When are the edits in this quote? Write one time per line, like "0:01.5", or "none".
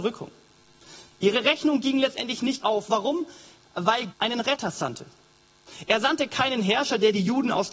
0:02.6
0:04.1